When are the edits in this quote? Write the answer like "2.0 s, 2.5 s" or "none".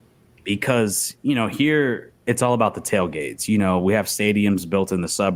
2.2 s